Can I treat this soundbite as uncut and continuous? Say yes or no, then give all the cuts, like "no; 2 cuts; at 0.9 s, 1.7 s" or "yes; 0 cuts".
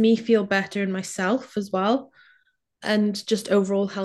yes; 0 cuts